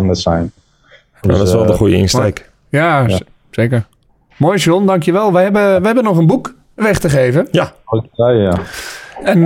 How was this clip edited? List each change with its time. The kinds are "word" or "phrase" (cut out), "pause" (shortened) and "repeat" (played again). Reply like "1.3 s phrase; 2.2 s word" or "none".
none